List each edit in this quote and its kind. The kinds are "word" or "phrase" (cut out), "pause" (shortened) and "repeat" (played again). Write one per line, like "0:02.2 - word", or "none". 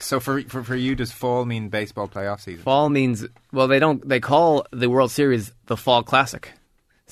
none

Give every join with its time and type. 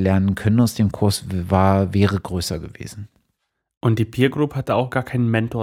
none

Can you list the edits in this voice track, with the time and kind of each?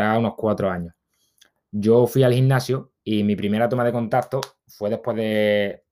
none

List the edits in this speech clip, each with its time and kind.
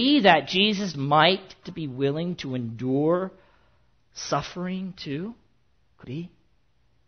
0:00.9 - word
0:01.6 - word
0:06.0 - word

